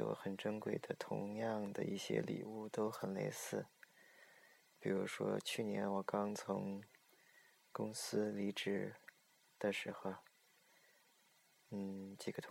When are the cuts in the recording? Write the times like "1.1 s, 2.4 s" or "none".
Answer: none